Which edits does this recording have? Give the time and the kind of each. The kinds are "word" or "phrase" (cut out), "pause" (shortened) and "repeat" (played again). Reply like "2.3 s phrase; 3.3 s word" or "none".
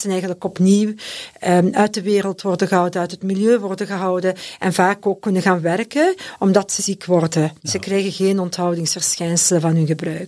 6.8 s word; 7.6 s pause